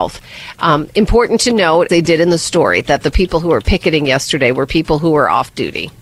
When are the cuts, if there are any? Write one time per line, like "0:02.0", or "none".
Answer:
0:01.9